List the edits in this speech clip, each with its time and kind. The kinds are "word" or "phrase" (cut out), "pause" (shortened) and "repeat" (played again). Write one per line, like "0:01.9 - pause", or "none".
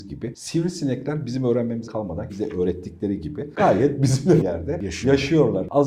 0:01.9 - word
0:02.3 - word
0:04.4 - phrase